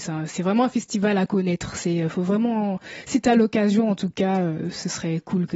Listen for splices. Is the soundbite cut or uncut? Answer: uncut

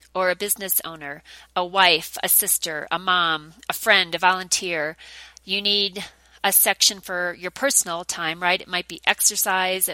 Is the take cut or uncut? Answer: uncut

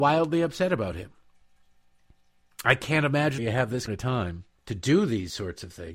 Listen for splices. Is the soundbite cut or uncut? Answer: cut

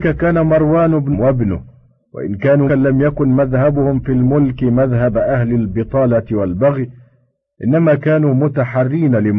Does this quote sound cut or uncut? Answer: cut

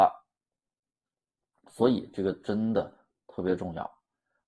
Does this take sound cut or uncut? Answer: uncut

